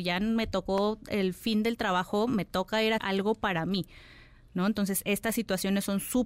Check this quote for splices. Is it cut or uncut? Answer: cut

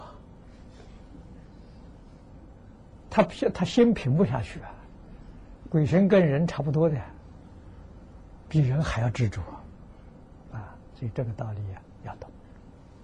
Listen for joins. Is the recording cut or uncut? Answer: cut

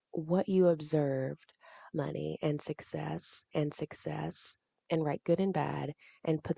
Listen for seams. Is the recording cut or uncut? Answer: cut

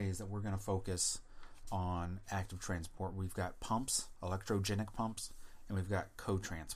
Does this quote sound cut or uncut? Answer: uncut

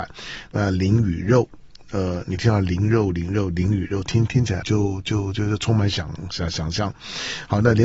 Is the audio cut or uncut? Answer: cut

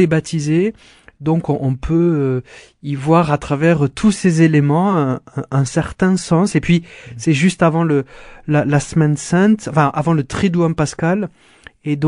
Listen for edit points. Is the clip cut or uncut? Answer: uncut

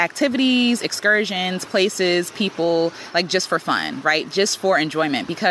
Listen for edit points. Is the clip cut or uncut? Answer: uncut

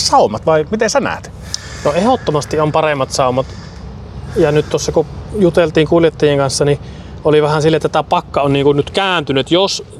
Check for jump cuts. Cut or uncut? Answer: uncut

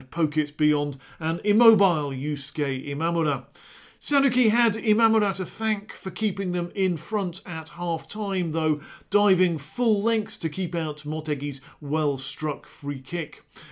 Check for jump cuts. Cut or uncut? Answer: uncut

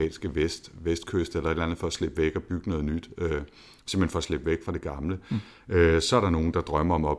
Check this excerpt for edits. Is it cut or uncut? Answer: uncut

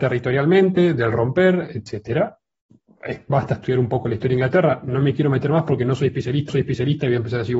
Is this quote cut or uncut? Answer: cut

